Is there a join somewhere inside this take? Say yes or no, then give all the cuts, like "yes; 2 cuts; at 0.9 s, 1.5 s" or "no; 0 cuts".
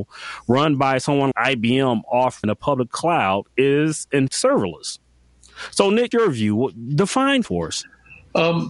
yes; 6 cuts; at 1.3 s, 2.4 s, 3.5 s, 4.3 s, 6.1 s, 7.4 s